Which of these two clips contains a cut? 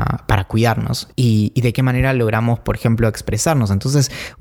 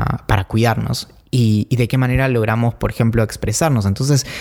first; 1 cut; at 1.1 s

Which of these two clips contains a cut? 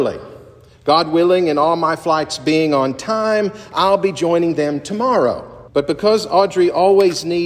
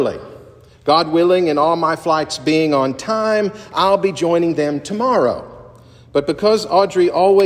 first; 1 cut; at 5.7 s

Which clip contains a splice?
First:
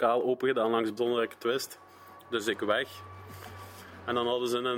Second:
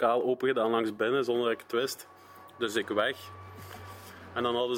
first; 1 cut; at 1.0 s

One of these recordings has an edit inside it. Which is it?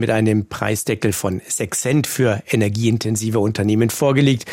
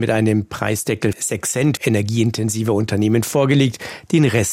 second; 2 cuts; at 1.1 s, 1.8 s

